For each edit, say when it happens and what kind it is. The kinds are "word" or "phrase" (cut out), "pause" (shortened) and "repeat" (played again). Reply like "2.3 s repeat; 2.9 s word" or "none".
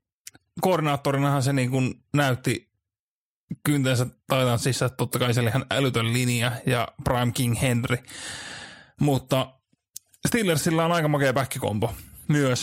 none